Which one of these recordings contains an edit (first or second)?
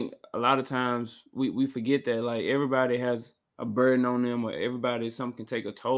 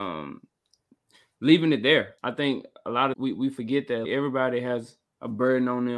second